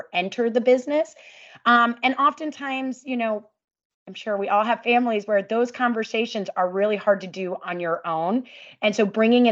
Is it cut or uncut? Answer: uncut